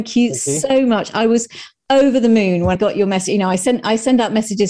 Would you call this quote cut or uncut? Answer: cut